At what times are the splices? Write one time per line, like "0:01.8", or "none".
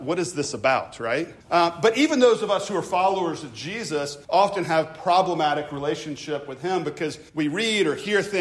0:01.4
0:04.2
0:07.3